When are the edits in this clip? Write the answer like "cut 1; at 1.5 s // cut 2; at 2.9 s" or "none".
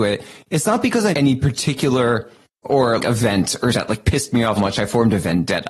cut 1; at 1.1 s // cut 2; at 2.6 s // cut 3; at 3.0 s // cut 4; at 3.7 s // cut 5; at 4.6 s